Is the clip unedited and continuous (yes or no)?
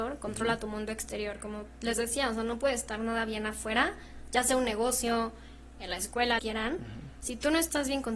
no